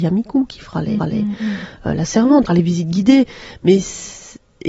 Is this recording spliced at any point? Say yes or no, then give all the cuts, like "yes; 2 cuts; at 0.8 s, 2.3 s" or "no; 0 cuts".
yes; 2 cuts; at 1.0 s, 2.5 s